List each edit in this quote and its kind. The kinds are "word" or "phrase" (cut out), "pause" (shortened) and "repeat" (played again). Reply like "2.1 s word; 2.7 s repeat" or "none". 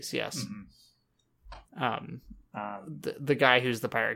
1.7 s pause